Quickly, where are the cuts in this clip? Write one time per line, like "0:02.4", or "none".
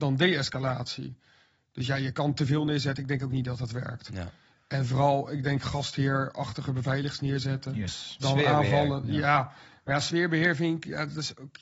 none